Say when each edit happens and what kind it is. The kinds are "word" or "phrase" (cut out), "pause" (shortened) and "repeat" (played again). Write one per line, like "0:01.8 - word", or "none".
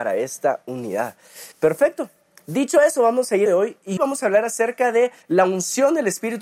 0:01.5 - pause
0:03.5 - phrase
0:04.0 - word
0:05.2 - pause